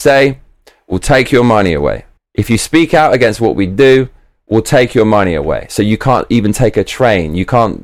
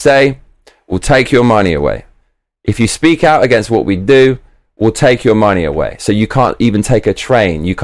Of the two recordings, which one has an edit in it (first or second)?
first